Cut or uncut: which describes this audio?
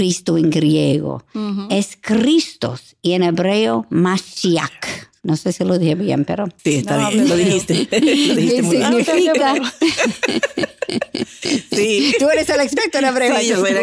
cut